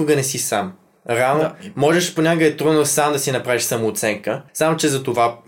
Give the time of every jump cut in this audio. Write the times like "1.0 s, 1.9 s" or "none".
4.5 s